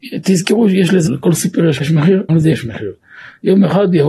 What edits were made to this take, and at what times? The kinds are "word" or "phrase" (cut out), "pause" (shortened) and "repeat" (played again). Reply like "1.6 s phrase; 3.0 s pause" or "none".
1.1 s word; 1.8 s word; 2.3 s word